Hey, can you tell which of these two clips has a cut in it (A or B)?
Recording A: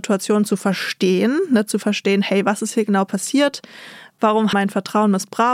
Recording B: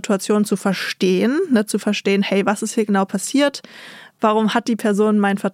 A